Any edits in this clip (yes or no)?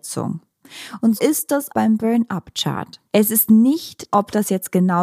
yes